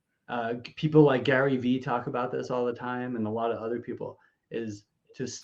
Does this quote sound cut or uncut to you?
uncut